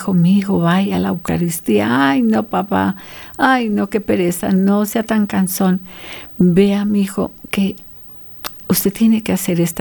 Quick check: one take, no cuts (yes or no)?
yes